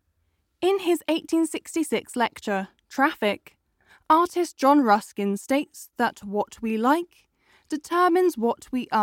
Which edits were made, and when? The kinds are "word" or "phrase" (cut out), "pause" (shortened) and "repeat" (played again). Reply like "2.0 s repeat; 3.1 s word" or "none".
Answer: none